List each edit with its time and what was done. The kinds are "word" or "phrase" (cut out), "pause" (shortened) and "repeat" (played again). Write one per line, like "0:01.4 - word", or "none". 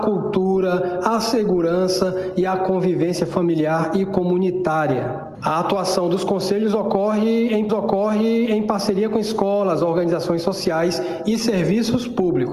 0:07.7 - repeat